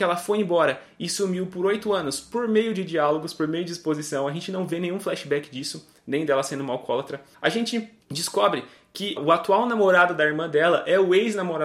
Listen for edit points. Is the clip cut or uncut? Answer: cut